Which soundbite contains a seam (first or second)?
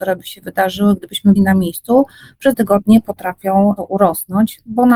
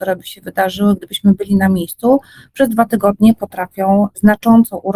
first